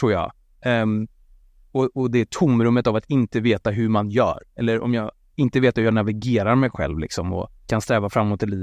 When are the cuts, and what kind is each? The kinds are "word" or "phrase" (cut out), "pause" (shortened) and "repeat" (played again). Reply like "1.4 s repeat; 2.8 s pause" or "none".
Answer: 1.4 s pause; 7.6 s pause